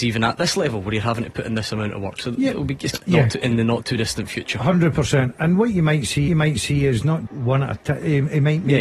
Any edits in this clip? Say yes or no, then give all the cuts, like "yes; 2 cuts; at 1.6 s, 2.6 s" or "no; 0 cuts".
yes; 3 cuts; at 2.9 s, 6.3 s, 7.3 s